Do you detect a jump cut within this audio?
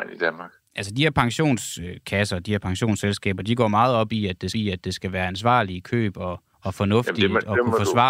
yes; 2 cuts; at 4.5 s, 6.5 s

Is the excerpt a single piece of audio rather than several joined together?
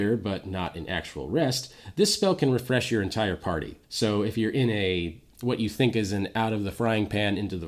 no; 1 cut; at 3.8 s

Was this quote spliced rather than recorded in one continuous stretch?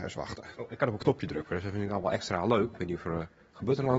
no; 0 cuts

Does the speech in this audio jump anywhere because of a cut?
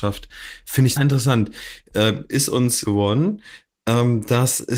yes; 2 cuts; at 1.0 s, 2.8 s

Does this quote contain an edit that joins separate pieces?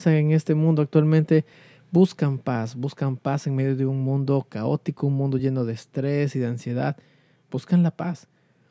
no; 0 cuts

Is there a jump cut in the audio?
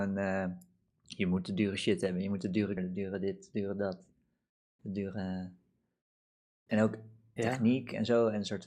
yes; 2 cuts; at 2.8 s, 7.4 s

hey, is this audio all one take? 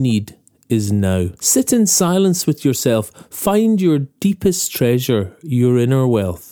no; 1 cut; at 1.4 s

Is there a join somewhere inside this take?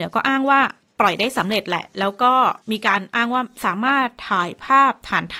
yes; 1 cut; at 2.6 s

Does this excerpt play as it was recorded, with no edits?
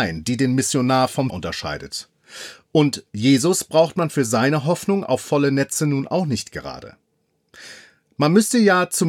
no; 1 cut; at 1.3 s

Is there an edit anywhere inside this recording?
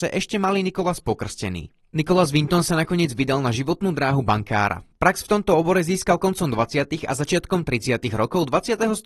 no; 0 cuts

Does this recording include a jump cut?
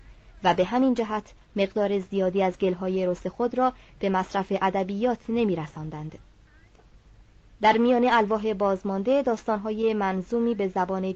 no; 0 cuts

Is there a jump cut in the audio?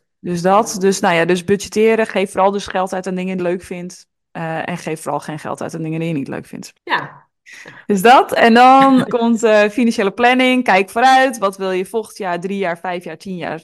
yes; 3 cuts; at 3.4 s, 6.8 s, 9.1 s

